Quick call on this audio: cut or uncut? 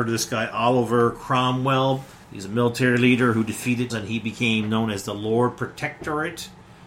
cut